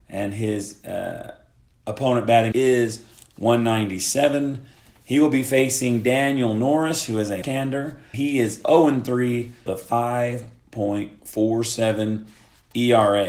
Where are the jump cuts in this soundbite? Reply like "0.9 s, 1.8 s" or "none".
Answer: 2.5 s, 7.4 s, 8.1 s, 9.7 s